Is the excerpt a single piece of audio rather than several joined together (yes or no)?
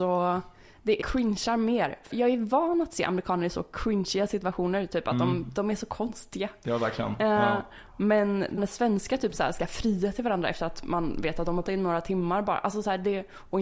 no